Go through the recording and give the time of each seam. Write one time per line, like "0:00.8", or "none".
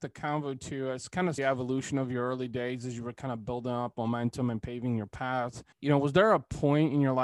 0:01.4
0:05.7